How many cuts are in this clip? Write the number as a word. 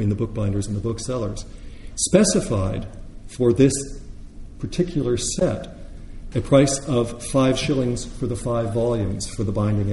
one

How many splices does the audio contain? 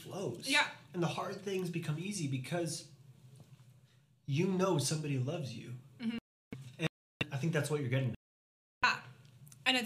zero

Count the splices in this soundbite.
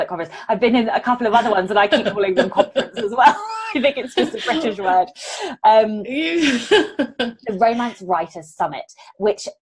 zero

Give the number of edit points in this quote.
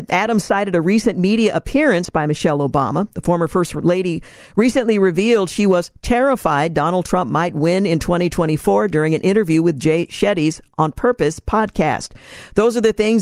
zero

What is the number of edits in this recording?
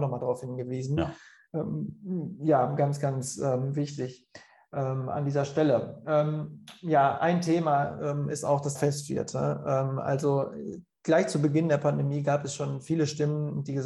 one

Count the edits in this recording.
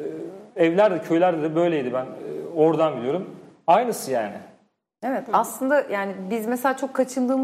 zero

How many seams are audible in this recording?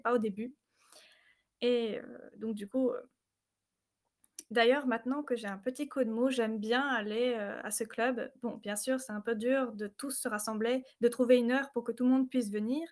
zero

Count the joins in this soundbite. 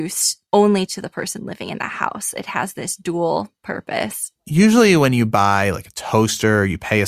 zero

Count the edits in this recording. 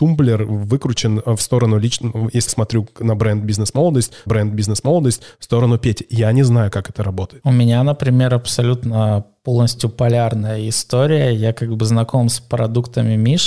two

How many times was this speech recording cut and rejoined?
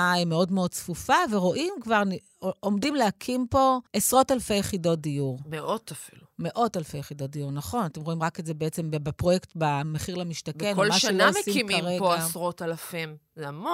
one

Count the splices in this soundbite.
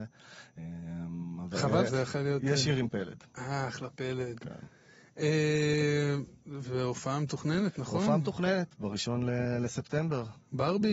one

